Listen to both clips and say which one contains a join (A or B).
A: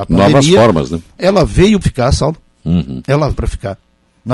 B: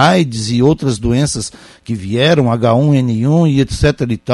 A